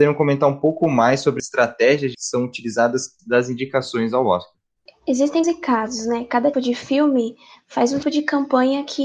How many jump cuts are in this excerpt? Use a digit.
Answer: 6